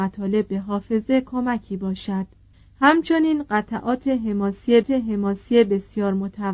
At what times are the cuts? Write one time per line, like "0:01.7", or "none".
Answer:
0:02.5
0:04.8